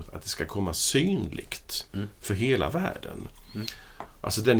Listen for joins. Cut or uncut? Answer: uncut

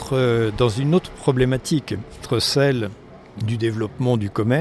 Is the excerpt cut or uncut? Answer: cut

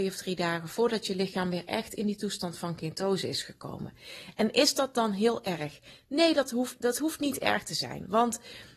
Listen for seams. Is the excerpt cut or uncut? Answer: uncut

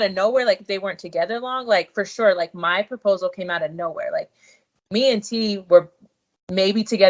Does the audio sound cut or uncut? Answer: uncut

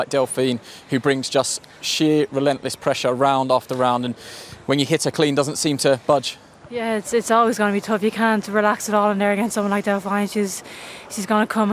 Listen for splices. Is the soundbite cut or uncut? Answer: uncut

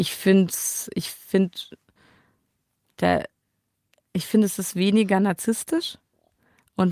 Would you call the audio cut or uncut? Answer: uncut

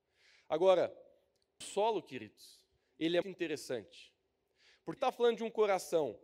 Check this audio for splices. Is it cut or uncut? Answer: cut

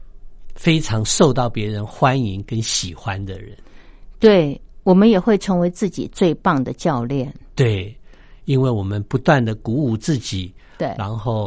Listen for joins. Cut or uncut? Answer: cut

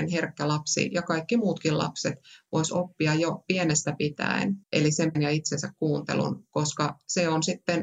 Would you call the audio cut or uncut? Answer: cut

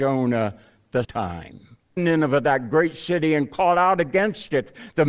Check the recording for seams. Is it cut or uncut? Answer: cut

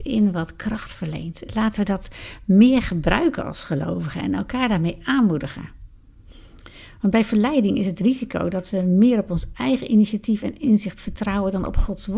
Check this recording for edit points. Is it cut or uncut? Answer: uncut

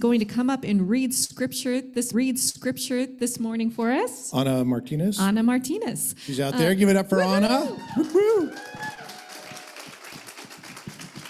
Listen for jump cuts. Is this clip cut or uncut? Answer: cut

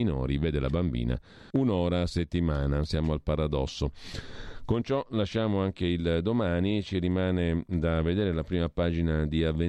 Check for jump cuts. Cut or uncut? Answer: cut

